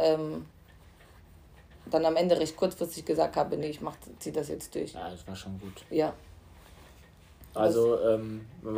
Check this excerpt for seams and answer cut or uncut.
uncut